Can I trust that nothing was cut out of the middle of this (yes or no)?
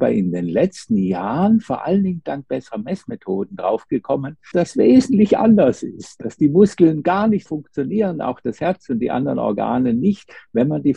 no